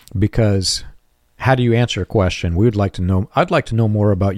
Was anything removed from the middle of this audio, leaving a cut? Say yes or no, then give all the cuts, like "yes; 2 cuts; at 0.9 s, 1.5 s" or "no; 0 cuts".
no; 0 cuts